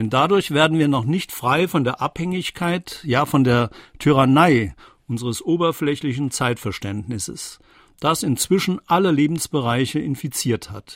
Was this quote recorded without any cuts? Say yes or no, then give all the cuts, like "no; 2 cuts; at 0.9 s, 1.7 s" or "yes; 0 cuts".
yes; 0 cuts